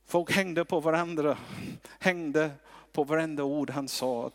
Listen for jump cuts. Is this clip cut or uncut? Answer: uncut